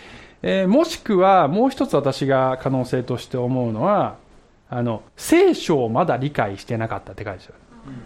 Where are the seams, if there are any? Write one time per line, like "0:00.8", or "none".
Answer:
0:05.1